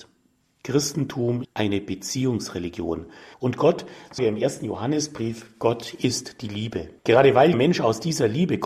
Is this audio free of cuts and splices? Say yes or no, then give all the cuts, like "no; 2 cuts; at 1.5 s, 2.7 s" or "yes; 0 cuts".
no; 5 cuts; at 1.4 s, 3.3 s, 4.2 s, 7.0 s, 7.5 s